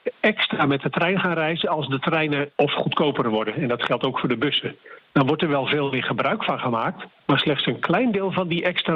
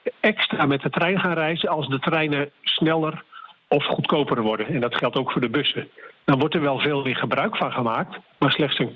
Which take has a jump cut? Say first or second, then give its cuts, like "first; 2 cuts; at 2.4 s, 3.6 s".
first; 1 cut; at 2.5 s